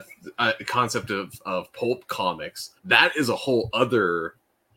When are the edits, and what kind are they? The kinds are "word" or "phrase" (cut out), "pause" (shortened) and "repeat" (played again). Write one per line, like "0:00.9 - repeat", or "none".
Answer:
0:02.8 - pause